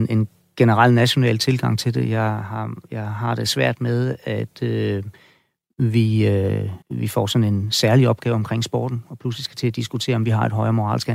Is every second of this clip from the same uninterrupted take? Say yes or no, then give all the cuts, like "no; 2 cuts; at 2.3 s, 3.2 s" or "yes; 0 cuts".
no; 1 cut; at 6.8 s